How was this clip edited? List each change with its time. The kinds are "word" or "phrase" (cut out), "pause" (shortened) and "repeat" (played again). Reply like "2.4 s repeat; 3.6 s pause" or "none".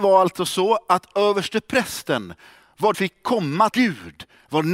2.9 s phrase; 3.7 s phrase